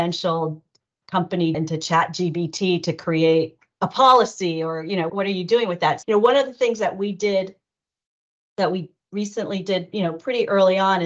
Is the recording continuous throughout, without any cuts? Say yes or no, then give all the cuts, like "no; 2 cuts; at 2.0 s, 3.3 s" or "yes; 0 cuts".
no; 3 cuts; at 1.5 s, 5.1 s, 6.0 s